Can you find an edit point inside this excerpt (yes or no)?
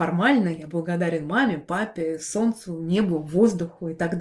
no